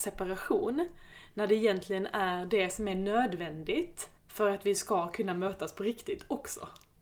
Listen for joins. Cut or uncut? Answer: cut